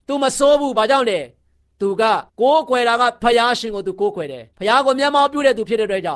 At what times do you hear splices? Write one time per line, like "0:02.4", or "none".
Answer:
0:02.3
0:04.5